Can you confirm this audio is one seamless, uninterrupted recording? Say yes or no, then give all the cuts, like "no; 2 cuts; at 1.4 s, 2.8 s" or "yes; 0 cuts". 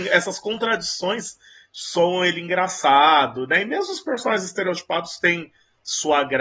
yes; 0 cuts